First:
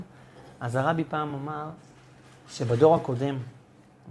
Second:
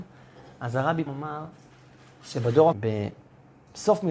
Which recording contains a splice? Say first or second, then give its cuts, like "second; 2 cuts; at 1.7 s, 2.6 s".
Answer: second; 2 cuts; at 1.1 s, 2.7 s